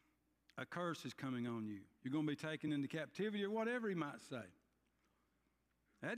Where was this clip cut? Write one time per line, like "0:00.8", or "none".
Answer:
none